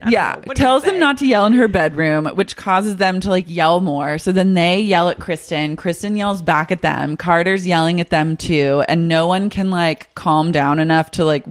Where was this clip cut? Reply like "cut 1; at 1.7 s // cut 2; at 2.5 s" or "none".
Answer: none